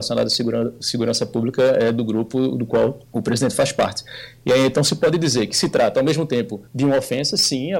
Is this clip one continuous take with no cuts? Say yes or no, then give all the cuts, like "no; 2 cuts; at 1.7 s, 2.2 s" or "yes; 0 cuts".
no; 2 cuts; at 3.0 s, 6.7 s